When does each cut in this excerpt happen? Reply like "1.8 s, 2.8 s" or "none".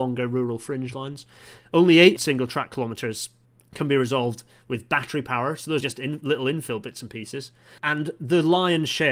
2.2 s, 3.4 s, 5.8 s, 7.8 s